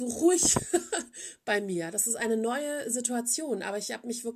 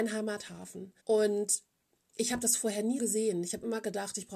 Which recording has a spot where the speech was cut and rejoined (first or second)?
second